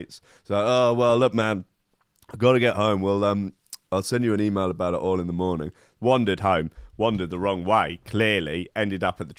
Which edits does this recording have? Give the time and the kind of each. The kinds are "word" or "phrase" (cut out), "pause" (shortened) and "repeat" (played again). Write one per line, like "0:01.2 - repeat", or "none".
none